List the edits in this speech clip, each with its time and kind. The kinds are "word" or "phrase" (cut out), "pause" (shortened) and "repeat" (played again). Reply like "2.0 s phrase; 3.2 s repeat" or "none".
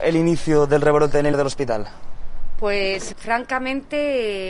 1.3 s word; 3.1 s word